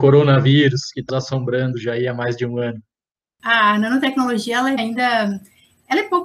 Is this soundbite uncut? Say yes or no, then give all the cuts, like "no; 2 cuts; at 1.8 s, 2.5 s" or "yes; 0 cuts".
no; 2 cuts; at 1.1 s, 4.8 s